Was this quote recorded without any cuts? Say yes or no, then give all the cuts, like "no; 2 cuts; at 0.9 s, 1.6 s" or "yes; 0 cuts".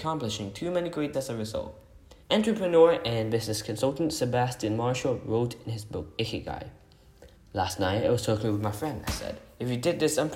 no; 3 cuts; at 1.1 s, 2.2 s, 7.4 s